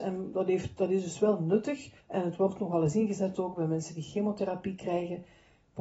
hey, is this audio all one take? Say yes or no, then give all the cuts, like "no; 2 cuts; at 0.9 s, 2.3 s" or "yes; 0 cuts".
no; 1 cut; at 2.0 s